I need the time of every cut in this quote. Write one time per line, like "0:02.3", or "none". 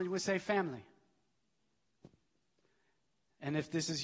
none